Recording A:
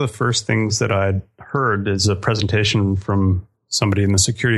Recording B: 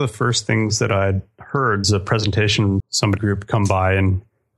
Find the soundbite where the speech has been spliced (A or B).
B